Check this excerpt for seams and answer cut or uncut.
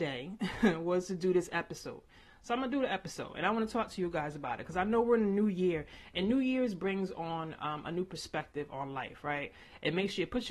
uncut